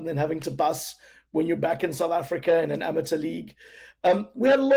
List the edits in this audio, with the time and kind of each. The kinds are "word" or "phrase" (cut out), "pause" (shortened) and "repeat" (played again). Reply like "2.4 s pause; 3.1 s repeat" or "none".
none

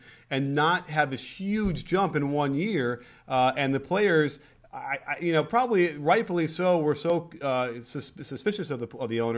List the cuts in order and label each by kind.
none

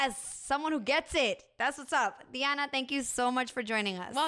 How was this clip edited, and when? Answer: none

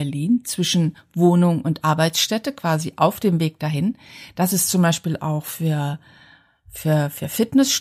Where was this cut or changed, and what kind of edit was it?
none

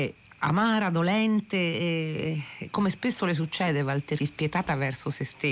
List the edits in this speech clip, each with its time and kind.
4.2 s word

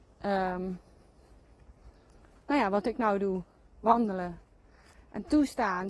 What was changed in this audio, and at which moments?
none

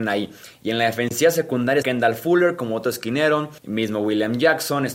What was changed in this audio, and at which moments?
1.8 s word; 3.6 s pause

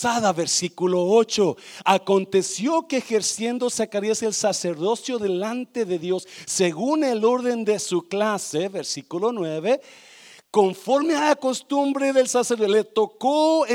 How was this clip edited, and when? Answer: none

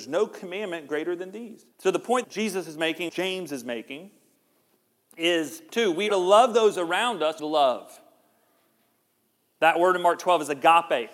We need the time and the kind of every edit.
1.7 s pause; 2.2 s word; 3.1 s phrase; 5.7 s phrase; 6.1 s word; 7.4 s phrase

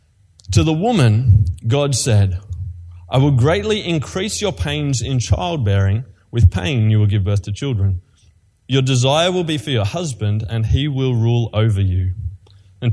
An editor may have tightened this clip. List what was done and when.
none

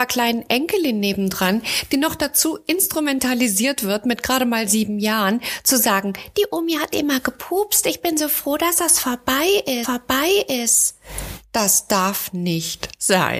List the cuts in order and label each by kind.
9.8 s repeat

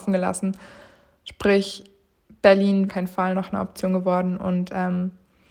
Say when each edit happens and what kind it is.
2.9 s phrase

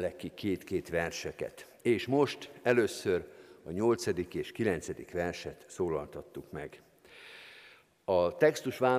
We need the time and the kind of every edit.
none

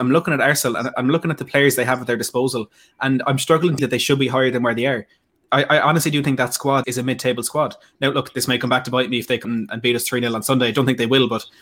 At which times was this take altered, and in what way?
3.8 s word; 6.8 s word; 9.4 s word

